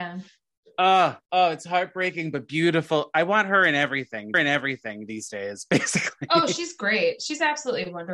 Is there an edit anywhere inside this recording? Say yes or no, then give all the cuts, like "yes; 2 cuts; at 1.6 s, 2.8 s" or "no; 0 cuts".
yes; 2 cuts; at 1.2 s, 4.3 s